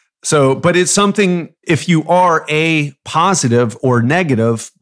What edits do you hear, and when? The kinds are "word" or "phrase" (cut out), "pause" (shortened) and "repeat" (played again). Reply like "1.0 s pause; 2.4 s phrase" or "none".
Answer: 1.6 s pause